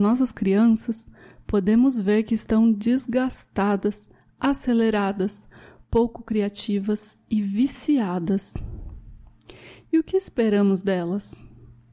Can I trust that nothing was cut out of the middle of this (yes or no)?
yes